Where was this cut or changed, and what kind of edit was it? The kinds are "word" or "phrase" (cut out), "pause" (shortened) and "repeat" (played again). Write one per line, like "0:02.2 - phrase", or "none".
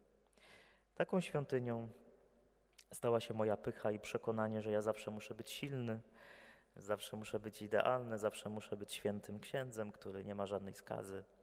none